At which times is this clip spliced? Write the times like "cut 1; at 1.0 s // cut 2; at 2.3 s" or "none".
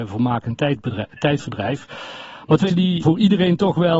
cut 1; at 2.7 s // cut 2; at 3.0 s